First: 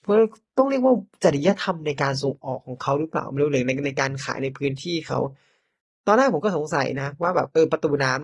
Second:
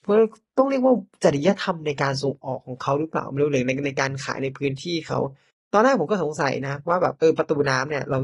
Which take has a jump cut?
second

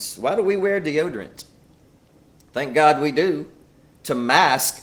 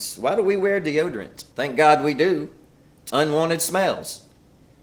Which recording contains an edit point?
second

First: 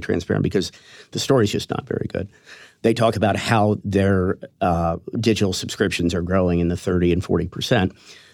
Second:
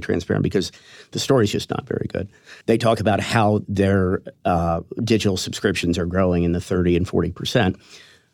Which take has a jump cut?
second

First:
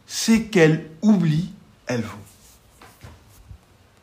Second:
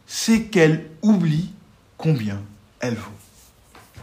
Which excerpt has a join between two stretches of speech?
first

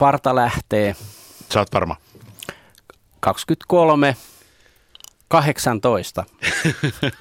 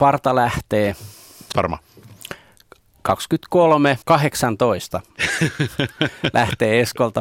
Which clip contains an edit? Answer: second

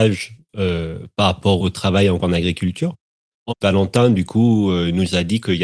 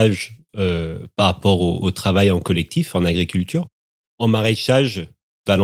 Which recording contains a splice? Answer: first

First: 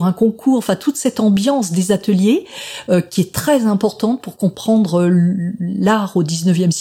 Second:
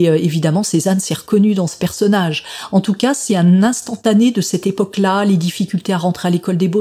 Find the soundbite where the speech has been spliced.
second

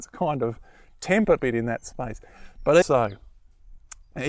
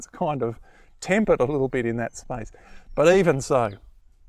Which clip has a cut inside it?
first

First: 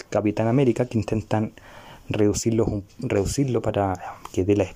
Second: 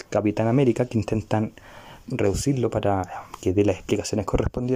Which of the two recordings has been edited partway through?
second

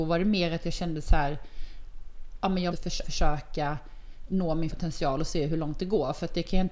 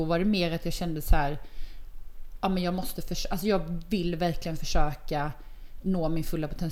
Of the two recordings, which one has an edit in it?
first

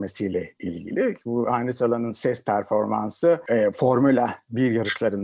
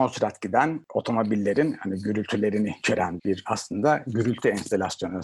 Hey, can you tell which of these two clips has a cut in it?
second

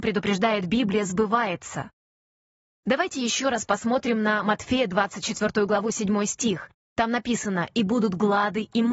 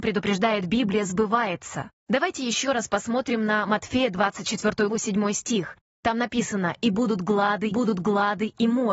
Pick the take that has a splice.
second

